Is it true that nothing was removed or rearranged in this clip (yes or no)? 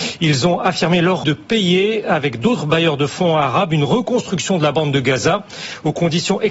no